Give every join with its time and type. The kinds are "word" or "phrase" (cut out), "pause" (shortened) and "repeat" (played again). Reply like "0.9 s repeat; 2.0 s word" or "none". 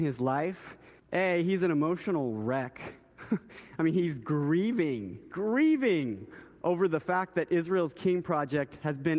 1.0 s pause